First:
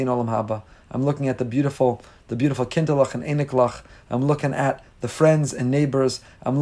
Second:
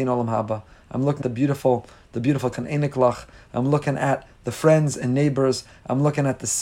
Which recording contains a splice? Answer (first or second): second